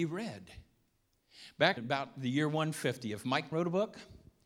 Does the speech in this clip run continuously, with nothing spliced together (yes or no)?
no